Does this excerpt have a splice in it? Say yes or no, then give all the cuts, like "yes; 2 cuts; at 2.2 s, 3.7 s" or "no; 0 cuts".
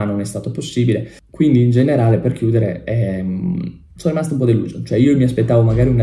yes; 1 cut; at 3.9 s